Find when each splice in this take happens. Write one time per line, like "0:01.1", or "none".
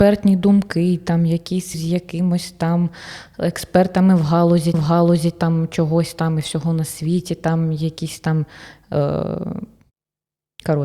0:01.7
0:04.7